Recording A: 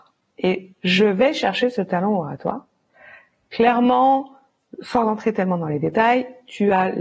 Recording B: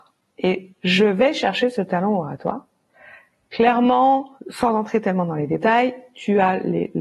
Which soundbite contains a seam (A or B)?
B